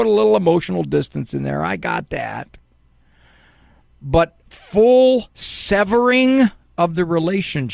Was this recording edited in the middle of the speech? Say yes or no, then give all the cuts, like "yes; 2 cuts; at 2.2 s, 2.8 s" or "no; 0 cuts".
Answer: yes; 1 cut; at 4.4 s